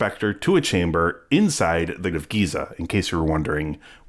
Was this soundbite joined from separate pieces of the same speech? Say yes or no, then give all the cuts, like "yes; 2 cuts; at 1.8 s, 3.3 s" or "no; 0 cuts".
yes; 1 cut; at 2.1 s